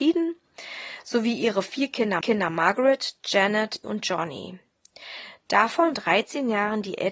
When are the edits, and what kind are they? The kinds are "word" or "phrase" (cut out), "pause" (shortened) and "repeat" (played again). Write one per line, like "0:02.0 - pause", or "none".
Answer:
0:02.2 - repeat
0:03.8 - word
0:05.9 - phrase